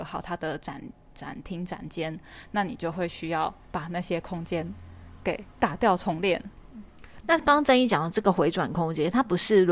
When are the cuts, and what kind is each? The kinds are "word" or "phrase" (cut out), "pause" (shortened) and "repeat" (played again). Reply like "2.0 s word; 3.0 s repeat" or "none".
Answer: 3.6 s pause